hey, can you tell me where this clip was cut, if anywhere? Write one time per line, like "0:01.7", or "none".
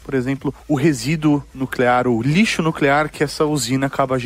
none

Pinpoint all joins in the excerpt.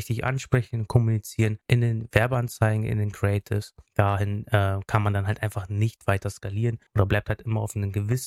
0:01.6
0:03.9
0:06.9

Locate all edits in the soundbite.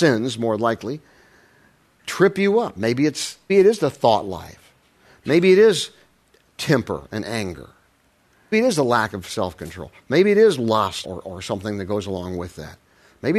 0:03.5
0:08.5
0:11.0

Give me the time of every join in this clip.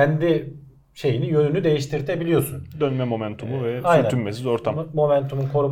none

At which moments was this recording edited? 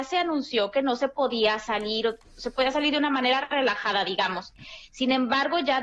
0:02.2

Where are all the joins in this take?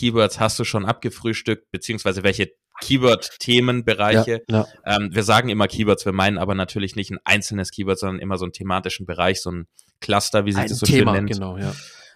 none

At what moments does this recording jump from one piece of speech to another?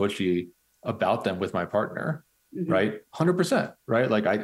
none

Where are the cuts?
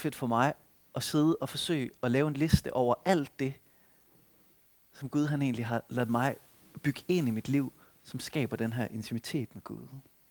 none

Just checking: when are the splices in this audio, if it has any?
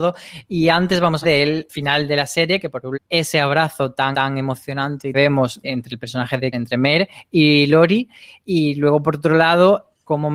0:01.2
0:01.7
0:02.9
0:04.1
0:05.1
0:05.6
0:06.5

